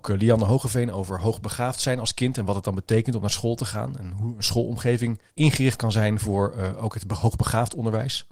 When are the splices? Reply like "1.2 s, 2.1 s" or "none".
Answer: 5.3 s